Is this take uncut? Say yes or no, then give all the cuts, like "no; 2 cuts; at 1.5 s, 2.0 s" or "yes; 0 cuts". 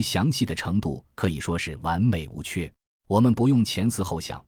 no; 1 cut; at 2.8 s